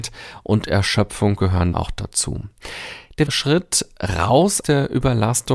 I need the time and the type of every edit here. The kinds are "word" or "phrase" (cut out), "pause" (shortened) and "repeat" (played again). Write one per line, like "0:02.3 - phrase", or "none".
0:01.7 - word
0:03.3 - word
0:04.6 - word